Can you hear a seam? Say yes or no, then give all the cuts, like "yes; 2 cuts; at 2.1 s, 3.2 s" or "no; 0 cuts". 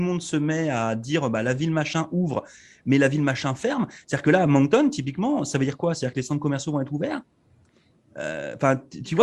no; 0 cuts